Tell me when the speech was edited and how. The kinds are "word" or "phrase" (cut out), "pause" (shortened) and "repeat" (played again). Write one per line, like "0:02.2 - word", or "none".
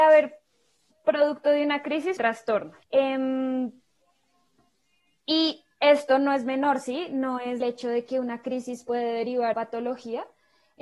0:02.2 - word
0:02.8 - pause
0:07.6 - phrase
0:09.5 - phrase

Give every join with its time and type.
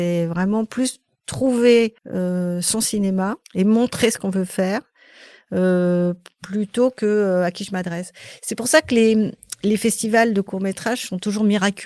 0:02.0 - pause
0:03.4 - pause

